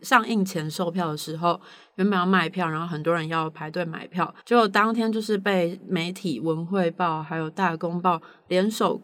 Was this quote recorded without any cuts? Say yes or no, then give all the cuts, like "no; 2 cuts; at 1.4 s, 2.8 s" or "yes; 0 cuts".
no; 1 cut; at 4.4 s